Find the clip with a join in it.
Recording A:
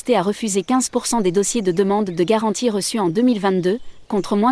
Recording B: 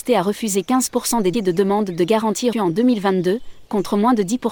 B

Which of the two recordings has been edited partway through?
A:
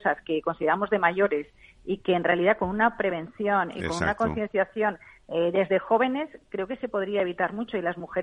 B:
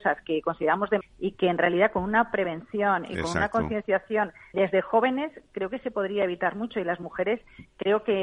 B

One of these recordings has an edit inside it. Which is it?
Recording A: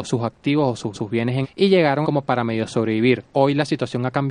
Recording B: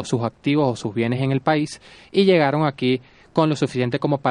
A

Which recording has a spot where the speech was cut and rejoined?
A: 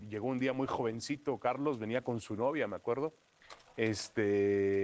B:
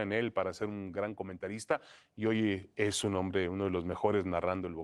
B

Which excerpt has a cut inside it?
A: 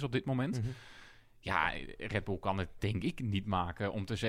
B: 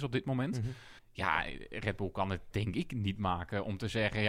B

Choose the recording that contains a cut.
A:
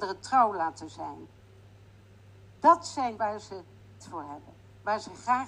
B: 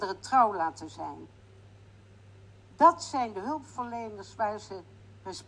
A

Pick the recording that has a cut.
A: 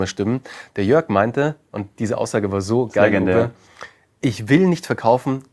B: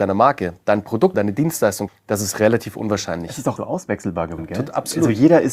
B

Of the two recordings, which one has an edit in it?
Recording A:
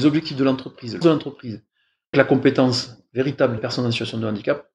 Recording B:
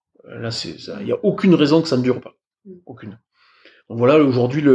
A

